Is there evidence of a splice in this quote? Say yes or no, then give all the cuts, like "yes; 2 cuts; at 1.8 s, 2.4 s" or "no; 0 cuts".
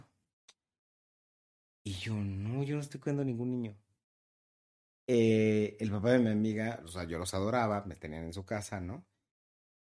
no; 0 cuts